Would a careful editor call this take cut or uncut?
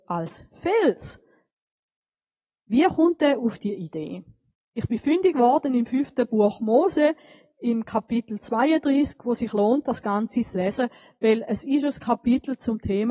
uncut